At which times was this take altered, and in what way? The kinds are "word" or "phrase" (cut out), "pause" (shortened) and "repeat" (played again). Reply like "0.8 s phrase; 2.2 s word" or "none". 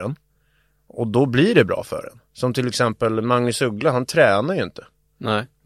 2.3 s pause